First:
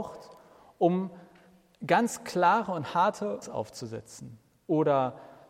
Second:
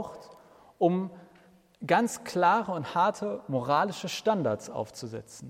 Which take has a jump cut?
first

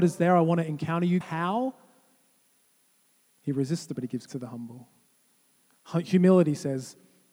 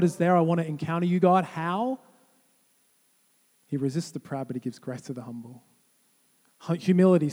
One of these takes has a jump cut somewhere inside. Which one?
first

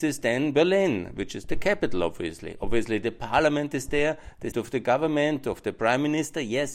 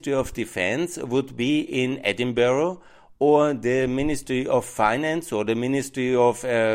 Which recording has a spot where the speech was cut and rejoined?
first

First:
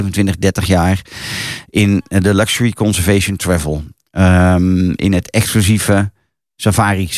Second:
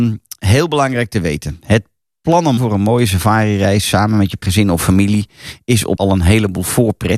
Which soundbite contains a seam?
second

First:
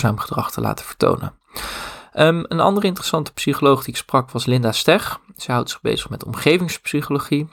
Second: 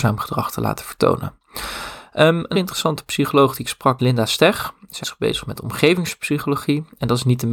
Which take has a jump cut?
second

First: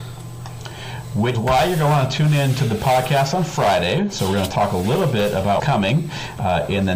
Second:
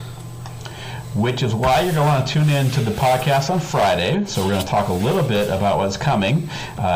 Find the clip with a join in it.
first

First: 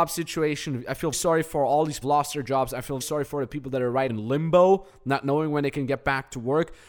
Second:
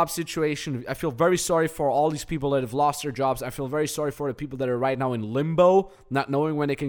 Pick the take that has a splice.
first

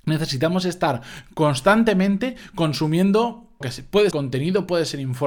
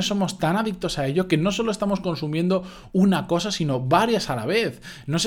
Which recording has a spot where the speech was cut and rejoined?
first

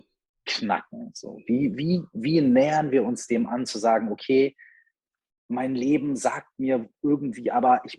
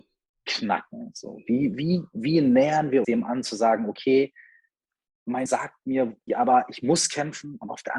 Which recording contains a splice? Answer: second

